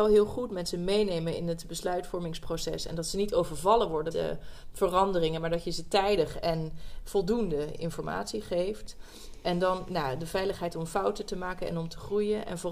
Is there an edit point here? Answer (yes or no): yes